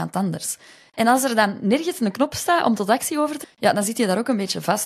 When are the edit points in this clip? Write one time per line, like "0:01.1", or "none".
0:03.4